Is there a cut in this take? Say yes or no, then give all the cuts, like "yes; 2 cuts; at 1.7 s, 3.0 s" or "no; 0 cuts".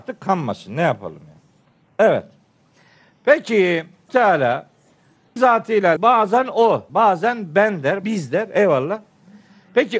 yes; 5 cuts; at 4.1 s, 5.4 s, 6.0 s, 6.9 s, 8.0 s